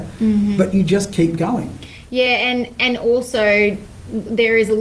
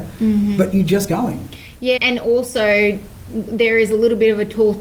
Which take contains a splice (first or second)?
second